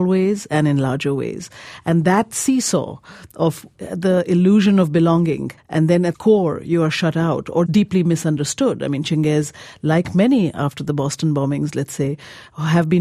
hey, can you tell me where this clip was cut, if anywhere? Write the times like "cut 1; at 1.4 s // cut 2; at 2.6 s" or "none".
cut 1; at 3.7 s // cut 2; at 5.6 s // cut 3; at 6.1 s // cut 4; at 7.7 s